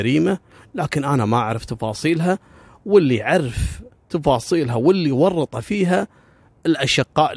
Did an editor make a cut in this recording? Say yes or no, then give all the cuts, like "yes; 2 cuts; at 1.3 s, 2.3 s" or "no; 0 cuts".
no; 0 cuts